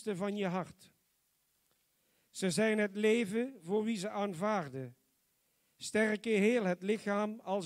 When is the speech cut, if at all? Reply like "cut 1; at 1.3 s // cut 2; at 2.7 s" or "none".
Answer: none